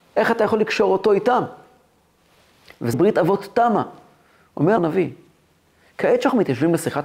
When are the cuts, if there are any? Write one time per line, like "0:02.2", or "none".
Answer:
0:02.9
0:04.8